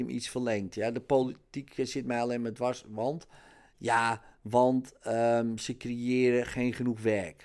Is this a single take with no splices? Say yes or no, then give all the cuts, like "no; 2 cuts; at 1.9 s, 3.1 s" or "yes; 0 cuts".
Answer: yes; 0 cuts